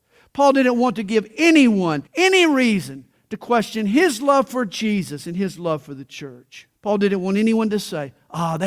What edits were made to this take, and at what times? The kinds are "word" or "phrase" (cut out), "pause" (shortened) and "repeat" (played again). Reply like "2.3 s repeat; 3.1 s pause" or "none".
2.1 s pause; 6.8 s pause